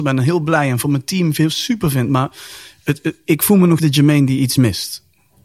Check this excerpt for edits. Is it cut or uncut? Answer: cut